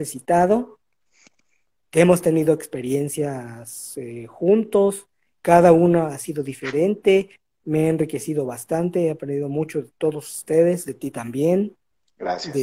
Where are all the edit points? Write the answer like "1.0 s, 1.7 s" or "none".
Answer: none